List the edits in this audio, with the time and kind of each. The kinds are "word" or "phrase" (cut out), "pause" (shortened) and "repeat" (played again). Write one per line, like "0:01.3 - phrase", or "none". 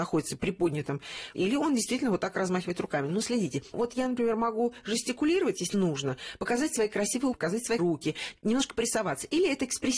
0:05.7 - word
0:07.3 - word
0:07.8 - word